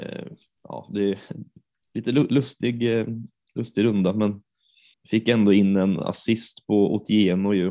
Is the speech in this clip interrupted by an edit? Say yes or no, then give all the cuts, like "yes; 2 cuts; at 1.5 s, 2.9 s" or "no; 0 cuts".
yes; 1 cut; at 4.9 s